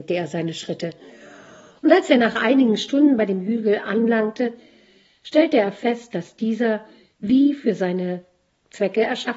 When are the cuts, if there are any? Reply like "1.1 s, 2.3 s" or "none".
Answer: none